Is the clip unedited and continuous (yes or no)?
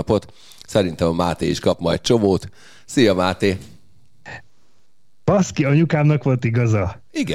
yes